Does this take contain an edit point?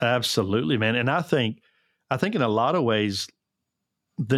no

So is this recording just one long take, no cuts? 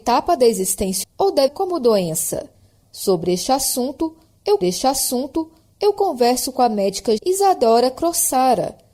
no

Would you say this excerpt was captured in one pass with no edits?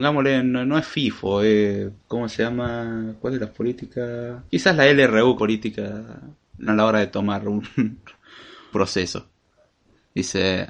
no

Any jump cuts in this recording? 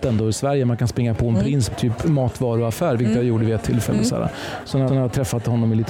yes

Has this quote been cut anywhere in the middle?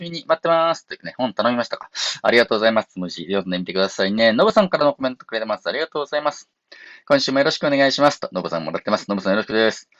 no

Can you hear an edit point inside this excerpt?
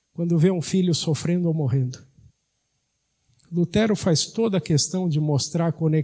yes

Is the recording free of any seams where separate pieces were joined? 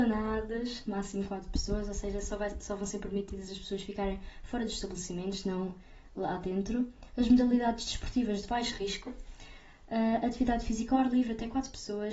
yes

